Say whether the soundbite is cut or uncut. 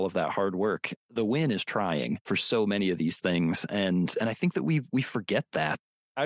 cut